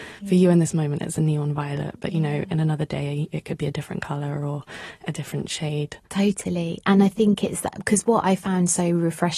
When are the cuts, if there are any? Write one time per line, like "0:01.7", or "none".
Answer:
0:06.0